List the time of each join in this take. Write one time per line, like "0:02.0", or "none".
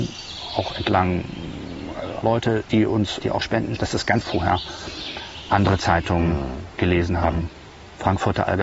0:02.2
0:03.2
0:03.8
0:04.2